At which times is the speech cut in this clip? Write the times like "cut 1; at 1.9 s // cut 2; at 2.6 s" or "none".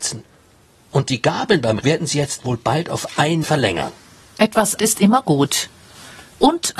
cut 1; at 1.8 s // cut 2; at 3.4 s // cut 3; at 4.8 s